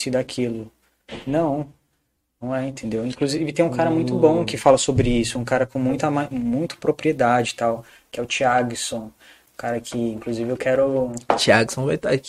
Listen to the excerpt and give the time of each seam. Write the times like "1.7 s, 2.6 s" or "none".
none